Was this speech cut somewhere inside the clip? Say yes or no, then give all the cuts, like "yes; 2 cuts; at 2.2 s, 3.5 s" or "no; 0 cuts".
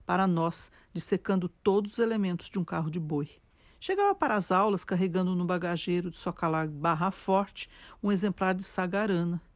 no; 0 cuts